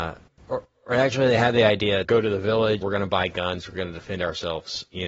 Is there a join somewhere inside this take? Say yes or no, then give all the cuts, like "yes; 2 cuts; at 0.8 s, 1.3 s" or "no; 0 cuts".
yes; 2 cuts; at 2.0 s, 2.8 s